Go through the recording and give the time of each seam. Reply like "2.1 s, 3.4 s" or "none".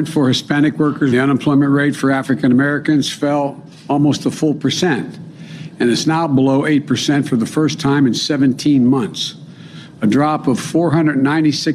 1.1 s